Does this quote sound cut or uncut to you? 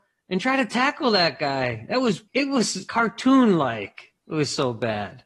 cut